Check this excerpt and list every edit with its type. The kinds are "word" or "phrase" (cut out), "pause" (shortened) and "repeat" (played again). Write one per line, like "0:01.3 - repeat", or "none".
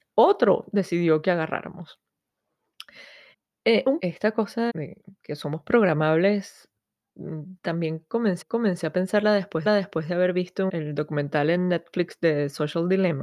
0:03.3 - pause
0:04.0 - word
0:04.7 - word
0:07.6 - pause
0:08.4 - repeat
0:09.7 - repeat
0:10.7 - word